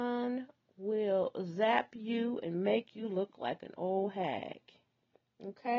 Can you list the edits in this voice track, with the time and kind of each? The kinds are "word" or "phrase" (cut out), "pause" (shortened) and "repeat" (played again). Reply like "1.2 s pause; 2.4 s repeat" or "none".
none